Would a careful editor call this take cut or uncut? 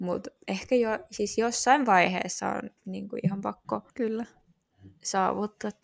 cut